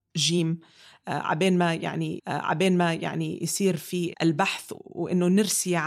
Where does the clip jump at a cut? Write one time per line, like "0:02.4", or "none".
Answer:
0:02.2